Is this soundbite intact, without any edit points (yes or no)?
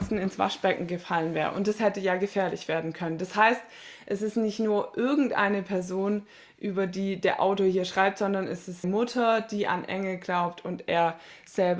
no